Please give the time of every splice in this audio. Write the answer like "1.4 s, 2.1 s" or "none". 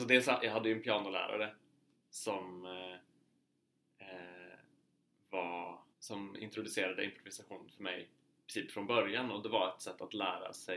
5.9 s